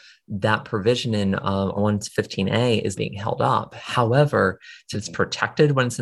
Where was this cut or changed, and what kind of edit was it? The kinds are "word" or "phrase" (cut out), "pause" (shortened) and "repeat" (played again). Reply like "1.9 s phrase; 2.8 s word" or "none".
1.8 s word; 3.0 s word; 4.9 s word